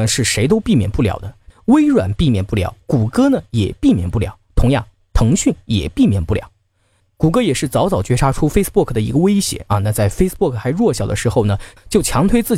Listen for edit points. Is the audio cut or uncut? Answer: uncut